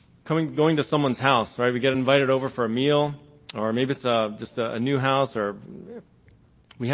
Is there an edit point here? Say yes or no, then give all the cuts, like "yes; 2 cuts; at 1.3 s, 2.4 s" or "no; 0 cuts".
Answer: no; 0 cuts